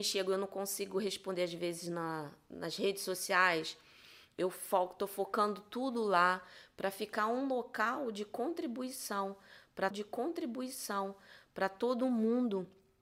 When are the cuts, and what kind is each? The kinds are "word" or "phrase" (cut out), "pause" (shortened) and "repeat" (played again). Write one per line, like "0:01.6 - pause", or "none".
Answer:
0:09.9 - repeat